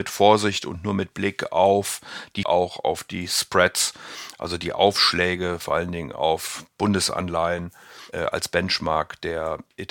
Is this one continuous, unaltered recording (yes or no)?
no